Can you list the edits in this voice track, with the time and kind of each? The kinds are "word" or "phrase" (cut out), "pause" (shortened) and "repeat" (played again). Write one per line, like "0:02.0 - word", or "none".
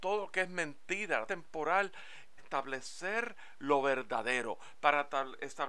0:01.3 - phrase
0:02.4 - word